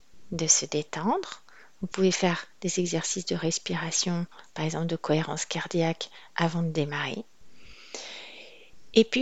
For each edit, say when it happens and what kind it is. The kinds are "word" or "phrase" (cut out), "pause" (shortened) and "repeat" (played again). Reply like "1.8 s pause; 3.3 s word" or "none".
none